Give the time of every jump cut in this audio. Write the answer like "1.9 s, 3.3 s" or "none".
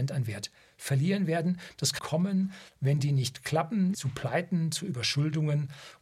2.0 s, 3.9 s